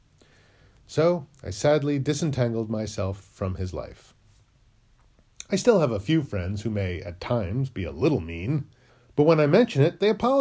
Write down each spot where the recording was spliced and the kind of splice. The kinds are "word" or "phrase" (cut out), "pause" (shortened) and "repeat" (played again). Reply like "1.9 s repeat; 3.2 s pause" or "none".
1.3 s pause; 8.9 s pause